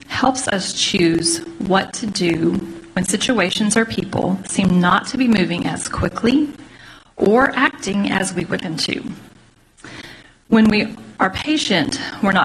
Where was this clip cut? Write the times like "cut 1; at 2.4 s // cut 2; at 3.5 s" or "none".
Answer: cut 1; at 8.6 s